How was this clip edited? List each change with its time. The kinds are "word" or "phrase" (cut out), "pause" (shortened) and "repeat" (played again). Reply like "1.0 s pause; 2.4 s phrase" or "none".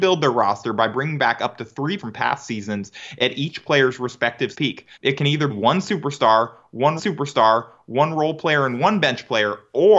2.0 s word; 4.5 s word; 4.9 s pause; 5.5 s word; 7.0 s repeat